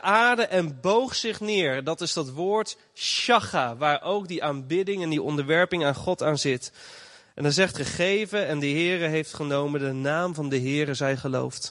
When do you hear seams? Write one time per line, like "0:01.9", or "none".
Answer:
0:07.7